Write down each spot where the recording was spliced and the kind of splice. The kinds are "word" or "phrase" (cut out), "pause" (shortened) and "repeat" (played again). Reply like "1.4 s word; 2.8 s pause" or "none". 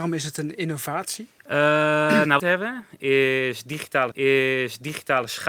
1.4 s pause; 2.4 s phrase; 4.1 s repeat